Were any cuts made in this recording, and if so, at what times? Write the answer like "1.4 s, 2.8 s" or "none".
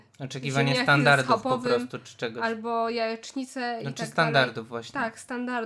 none